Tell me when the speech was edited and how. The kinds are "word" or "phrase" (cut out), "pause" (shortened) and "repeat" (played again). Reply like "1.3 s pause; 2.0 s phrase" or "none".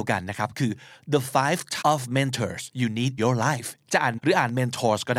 1.8 s word; 2.7 s pause; 3.2 s word; 3.8 s pause; 4.2 s word